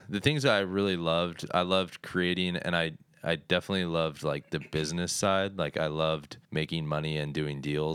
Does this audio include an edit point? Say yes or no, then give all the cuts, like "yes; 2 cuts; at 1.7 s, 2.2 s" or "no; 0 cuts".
yes; 1 cut; at 6.4 s